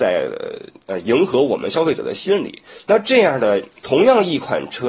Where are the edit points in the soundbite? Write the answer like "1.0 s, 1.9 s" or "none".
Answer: none